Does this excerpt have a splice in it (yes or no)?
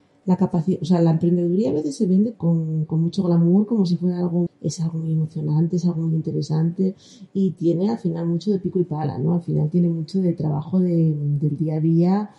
yes